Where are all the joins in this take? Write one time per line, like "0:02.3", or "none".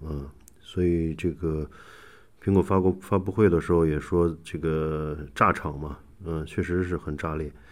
none